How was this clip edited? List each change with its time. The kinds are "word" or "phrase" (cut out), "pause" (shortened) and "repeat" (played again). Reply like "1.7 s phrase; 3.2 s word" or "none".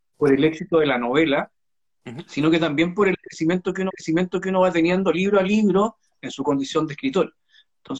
3.9 s repeat